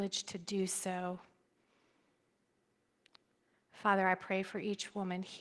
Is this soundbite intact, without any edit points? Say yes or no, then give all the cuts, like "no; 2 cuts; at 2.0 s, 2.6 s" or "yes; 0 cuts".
yes; 0 cuts